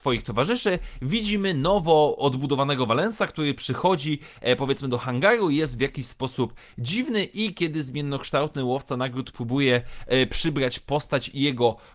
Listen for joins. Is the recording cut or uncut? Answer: uncut